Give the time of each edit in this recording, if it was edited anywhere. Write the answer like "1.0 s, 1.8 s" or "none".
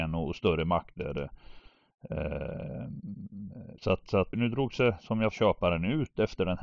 3.7 s, 4.3 s, 5.3 s